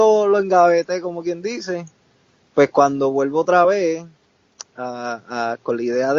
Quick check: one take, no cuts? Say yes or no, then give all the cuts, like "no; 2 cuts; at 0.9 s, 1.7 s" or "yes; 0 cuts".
yes; 0 cuts